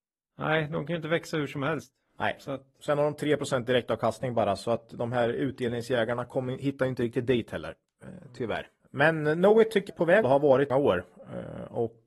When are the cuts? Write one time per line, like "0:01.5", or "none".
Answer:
0:08.8
0:09.9
0:10.2
0:10.7